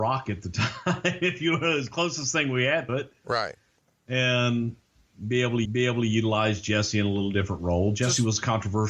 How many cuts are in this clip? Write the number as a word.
two